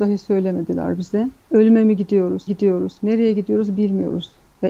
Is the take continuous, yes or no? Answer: no